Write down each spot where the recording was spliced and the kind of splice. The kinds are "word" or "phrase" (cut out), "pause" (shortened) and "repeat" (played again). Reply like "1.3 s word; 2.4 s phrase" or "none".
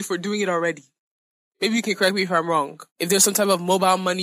2.9 s pause

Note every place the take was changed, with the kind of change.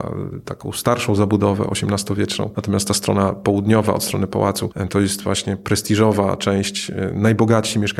none

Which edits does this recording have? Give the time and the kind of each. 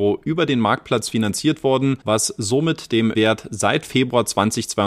2.0 s pause; 3.1 s word

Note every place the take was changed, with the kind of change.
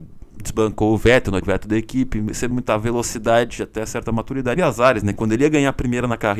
1.4 s word; 2.5 s word; 4.6 s phrase

